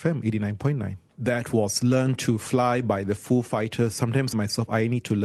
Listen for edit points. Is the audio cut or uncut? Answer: cut